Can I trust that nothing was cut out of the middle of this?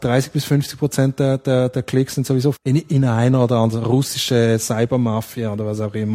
no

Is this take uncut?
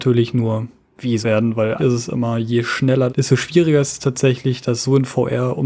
no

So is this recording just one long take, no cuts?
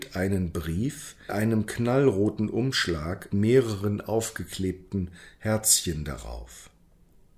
no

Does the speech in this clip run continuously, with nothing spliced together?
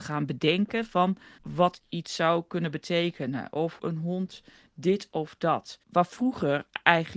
no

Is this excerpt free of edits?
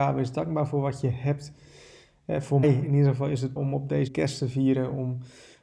no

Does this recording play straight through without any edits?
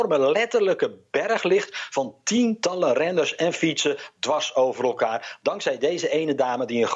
yes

